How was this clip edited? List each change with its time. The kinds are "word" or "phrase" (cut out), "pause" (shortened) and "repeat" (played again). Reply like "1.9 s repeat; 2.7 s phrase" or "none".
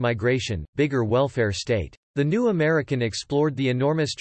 2.0 s pause